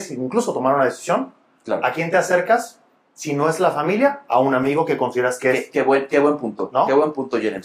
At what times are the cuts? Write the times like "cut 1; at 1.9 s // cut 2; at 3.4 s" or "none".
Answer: none